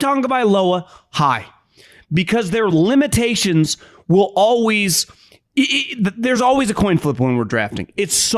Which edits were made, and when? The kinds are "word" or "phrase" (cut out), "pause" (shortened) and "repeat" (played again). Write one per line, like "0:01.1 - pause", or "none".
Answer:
none